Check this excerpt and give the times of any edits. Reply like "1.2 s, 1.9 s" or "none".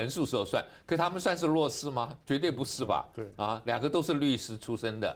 2.2 s